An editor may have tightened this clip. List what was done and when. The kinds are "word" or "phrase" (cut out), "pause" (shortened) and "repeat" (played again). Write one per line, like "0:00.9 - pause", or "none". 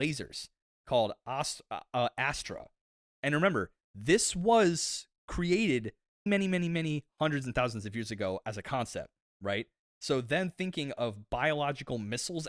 0:06.3 - phrase

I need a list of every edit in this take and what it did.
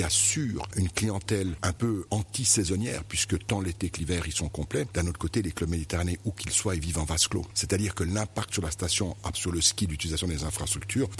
0:09.3 - word

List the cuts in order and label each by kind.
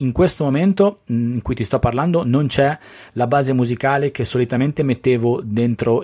none

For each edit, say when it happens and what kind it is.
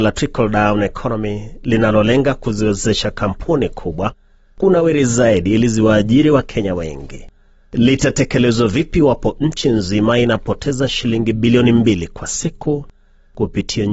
none

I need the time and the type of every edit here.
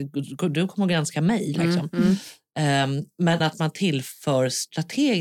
0:03.4 - word

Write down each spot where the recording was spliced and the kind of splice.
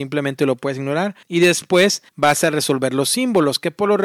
0:01.2 - pause
0:02.1 - pause

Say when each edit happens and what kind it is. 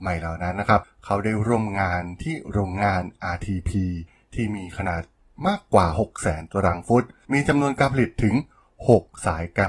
none

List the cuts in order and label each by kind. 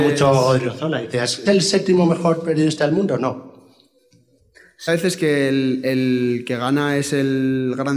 0:01.5 - word
0:04.9 - phrase

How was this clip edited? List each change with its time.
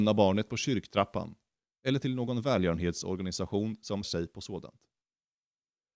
0:04.0 - word

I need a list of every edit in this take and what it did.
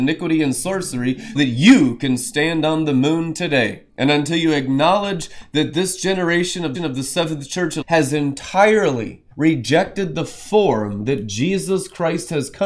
0:01.4 - word
0:03.9 - pause
0:06.7 - repeat
0:07.8 - word
0:09.3 - pause

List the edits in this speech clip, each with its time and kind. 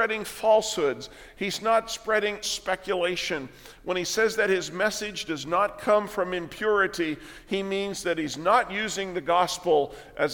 0:02.4 - word

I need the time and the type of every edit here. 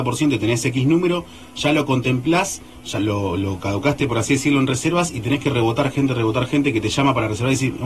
0:03.0 - word

